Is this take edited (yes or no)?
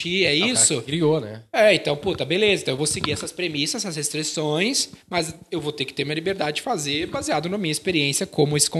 no